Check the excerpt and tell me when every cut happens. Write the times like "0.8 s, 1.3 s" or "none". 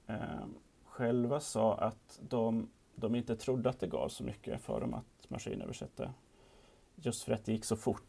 none